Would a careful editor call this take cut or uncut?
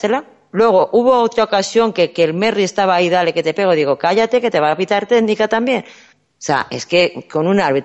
uncut